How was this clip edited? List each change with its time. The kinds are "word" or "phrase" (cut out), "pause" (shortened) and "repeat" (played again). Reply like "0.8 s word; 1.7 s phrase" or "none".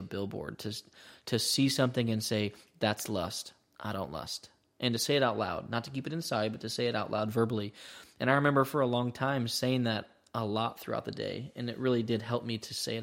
none